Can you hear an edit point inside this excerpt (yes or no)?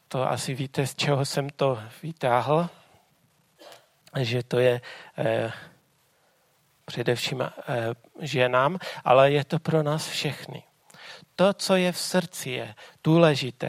no